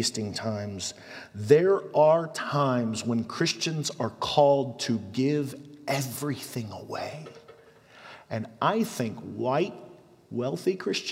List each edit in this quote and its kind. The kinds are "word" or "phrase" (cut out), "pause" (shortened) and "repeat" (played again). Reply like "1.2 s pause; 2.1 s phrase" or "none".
none